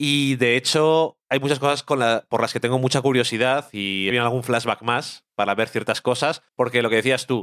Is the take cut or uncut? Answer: cut